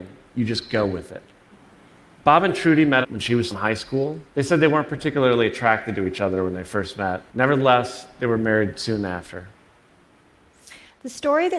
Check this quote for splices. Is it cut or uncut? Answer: cut